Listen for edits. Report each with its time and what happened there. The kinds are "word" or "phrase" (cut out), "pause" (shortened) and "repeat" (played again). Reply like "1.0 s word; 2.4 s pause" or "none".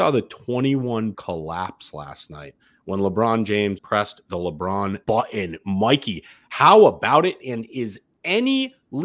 1.1 s word; 3.8 s word; 5.0 s word